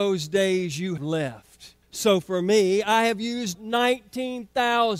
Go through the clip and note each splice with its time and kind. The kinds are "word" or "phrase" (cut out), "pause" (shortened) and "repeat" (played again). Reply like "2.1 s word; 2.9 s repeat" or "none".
1.0 s word; 1.8 s pause; 3.5 s word